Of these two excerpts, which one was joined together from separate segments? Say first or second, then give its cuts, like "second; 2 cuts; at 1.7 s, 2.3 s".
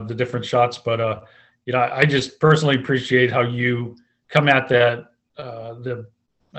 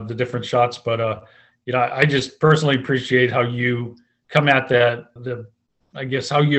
second; 1 cut; at 5.2 s